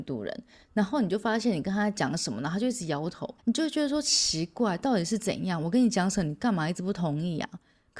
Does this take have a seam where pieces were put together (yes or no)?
yes